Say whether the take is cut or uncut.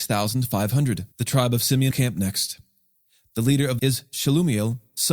cut